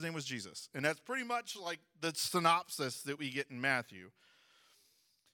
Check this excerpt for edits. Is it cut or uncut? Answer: uncut